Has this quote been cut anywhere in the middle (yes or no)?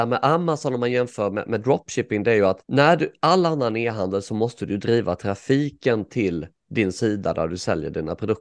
yes